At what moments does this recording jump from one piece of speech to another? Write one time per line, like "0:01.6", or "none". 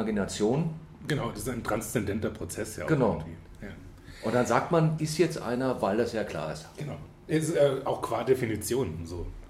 0:05.0

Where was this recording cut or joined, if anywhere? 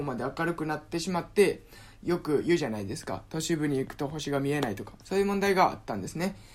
0:05.0

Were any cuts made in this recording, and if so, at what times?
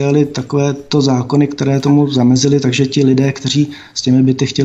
none

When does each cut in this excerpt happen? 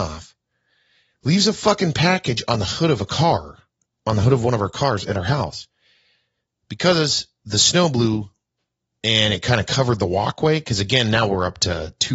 none

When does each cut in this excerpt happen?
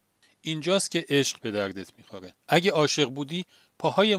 0:02.4

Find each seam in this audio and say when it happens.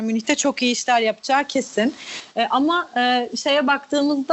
none

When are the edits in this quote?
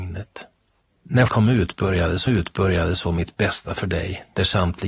0:01.3
0:02.3

